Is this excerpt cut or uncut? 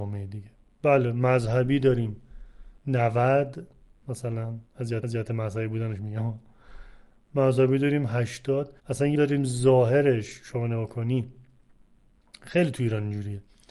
cut